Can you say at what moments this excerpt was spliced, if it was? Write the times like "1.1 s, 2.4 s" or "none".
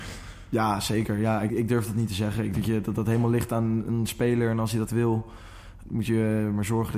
1.5 s, 2.5 s, 4.9 s, 5.8 s